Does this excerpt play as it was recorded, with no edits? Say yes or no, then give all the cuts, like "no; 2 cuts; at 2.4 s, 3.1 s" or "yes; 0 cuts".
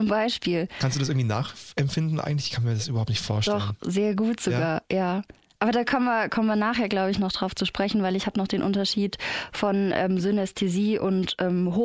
yes; 0 cuts